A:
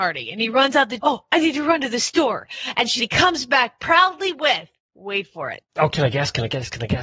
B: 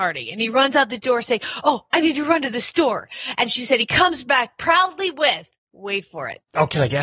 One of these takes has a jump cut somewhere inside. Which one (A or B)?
A